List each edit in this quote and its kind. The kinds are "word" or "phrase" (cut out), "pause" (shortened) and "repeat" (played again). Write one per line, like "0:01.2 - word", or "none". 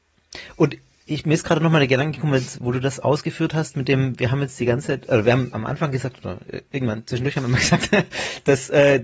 0:05.5 - word